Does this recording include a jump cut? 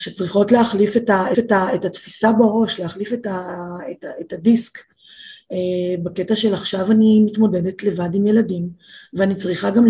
yes; 1 cut; at 1.3 s

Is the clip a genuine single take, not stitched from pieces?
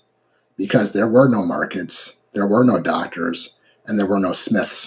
yes; 0 cuts

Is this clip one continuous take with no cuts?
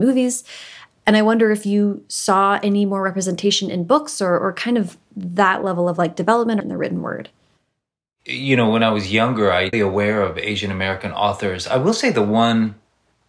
no; 2 cuts; at 6.6 s, 9.7 s

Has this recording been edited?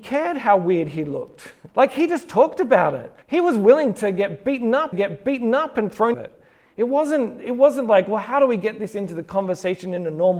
yes; 4 cuts; at 1.7 s, 3.2 s, 4.9 s, 6.1 s

